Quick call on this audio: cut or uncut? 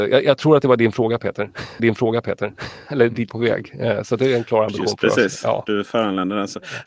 cut